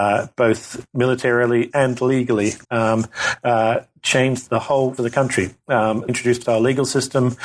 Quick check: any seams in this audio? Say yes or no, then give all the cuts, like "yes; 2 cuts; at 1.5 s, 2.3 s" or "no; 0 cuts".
yes; 6 cuts; at 1.7 s, 2.6 s, 4.5 s, 5.0 s, 6.1 s, 6.4 s